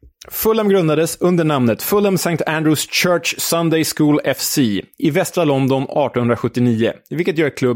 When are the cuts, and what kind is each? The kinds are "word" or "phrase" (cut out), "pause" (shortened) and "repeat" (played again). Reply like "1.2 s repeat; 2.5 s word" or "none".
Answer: none